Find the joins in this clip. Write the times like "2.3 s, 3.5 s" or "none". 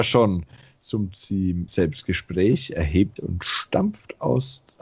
1.7 s, 3.2 s